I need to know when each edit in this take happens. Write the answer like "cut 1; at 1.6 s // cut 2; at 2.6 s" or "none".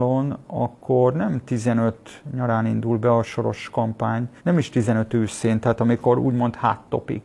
cut 1; at 4.4 s